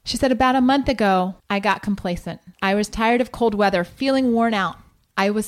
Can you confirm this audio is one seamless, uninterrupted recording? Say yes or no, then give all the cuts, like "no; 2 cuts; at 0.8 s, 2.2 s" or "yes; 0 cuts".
no; 2 cuts; at 1.4 s, 2.5 s